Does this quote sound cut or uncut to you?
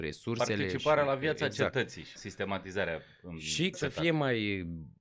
cut